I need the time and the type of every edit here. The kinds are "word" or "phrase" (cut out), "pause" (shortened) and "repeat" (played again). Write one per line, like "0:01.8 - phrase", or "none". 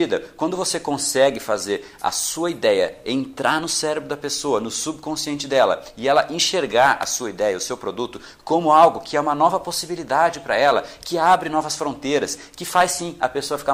none